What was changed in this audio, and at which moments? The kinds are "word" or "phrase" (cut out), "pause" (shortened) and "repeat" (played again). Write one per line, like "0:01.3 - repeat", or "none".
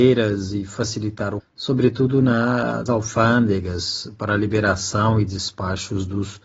0:01.4 - word
0:02.9 - word